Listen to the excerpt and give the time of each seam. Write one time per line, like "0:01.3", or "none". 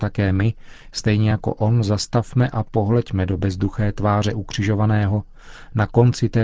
none